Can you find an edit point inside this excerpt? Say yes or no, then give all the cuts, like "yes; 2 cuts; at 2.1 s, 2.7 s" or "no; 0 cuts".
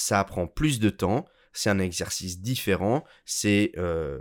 no; 0 cuts